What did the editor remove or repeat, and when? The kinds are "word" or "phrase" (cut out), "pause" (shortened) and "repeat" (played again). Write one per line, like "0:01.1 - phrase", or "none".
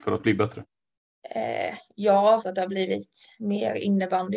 0:02.4 - word